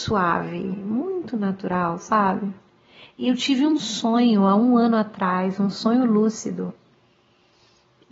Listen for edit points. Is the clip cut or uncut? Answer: uncut